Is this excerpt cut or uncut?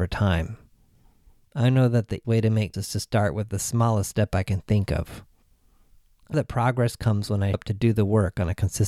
cut